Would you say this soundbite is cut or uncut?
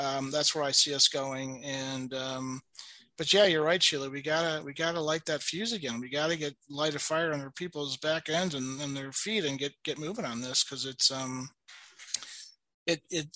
uncut